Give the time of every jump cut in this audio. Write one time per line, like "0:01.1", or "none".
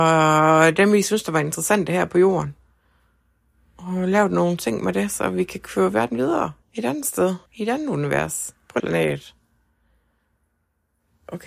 0:06.6
0:07.5
0:08.8